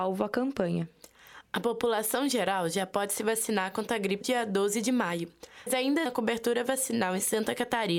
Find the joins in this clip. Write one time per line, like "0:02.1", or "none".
0:04.2
0:05.7
0:06.1